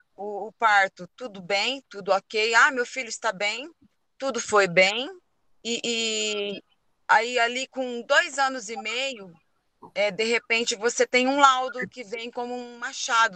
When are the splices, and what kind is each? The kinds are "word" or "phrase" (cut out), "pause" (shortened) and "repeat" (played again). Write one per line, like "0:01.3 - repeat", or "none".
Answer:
none